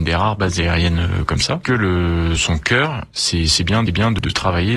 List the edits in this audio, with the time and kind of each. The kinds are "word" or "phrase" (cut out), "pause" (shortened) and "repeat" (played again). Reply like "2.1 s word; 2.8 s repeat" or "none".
1.6 s word; 2.4 s word; 3.9 s repeat